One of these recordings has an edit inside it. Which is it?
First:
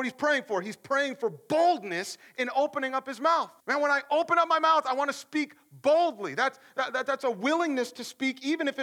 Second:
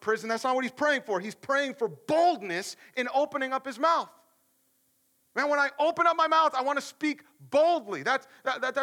first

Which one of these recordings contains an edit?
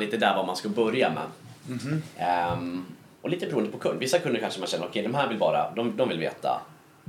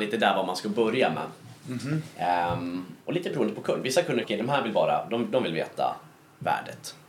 second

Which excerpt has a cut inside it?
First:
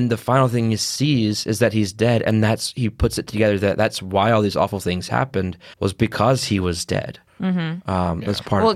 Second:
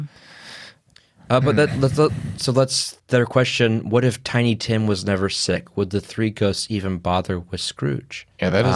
first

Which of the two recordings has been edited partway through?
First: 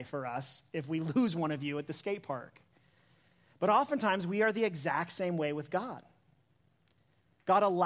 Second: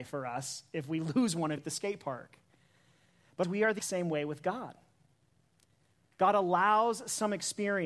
second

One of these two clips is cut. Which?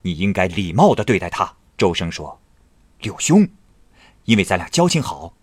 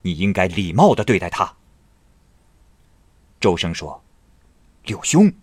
first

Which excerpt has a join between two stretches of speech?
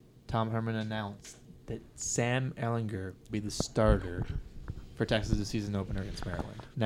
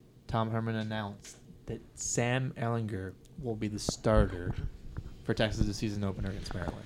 first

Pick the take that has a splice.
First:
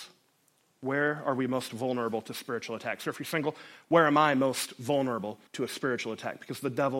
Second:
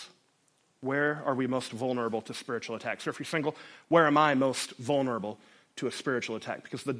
first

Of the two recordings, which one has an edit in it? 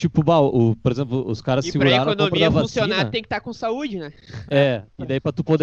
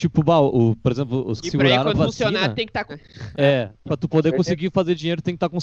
second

